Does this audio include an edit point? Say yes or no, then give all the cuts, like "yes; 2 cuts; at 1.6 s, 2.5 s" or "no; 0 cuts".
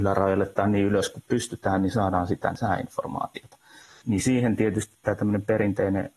no; 0 cuts